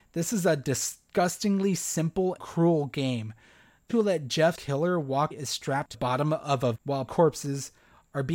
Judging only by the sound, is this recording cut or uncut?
cut